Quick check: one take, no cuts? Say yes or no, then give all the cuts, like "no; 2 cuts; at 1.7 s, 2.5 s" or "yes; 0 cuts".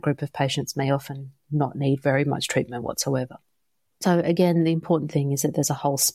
yes; 0 cuts